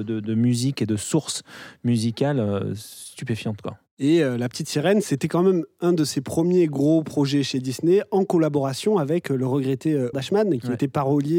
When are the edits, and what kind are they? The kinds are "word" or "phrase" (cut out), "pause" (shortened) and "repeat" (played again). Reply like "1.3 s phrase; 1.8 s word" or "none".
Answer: 10.1 s word